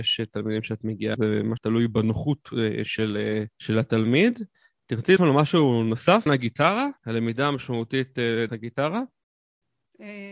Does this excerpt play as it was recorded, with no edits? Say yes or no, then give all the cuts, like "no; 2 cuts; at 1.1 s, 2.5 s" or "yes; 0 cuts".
no; 7 cuts; at 1.1 s, 1.6 s, 3.5 s, 5.2 s, 6.3 s, 7.0 s, 8.5 s